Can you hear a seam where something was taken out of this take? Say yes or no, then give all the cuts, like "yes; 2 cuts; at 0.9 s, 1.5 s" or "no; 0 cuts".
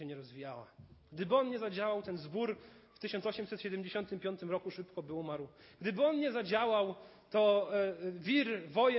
no; 0 cuts